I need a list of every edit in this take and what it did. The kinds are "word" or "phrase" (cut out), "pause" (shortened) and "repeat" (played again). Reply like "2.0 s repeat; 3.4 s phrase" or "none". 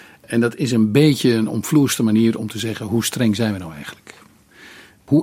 none